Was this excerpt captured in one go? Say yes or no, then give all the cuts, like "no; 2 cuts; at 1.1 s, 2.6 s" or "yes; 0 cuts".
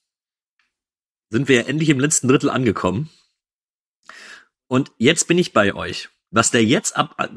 yes; 0 cuts